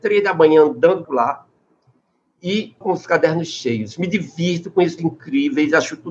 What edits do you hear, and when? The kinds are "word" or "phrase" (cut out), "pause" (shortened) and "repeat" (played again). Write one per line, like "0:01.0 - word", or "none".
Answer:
0:01.0 - word
0:02.8 - word
0:05.0 - word